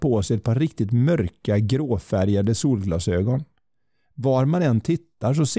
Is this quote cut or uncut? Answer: uncut